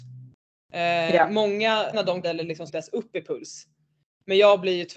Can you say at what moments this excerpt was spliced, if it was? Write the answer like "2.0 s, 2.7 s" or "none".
1.9 s, 2.2 s, 2.7 s